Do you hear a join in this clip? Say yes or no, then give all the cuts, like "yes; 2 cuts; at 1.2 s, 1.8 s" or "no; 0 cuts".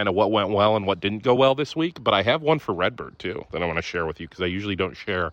no; 0 cuts